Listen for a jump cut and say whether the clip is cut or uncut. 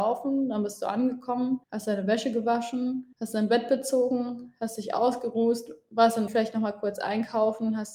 cut